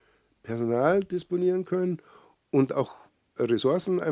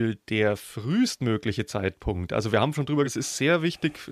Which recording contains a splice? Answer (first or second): second